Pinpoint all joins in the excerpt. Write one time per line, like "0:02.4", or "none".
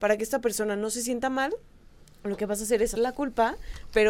0:03.0